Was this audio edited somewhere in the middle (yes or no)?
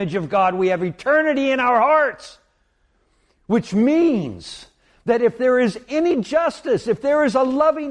no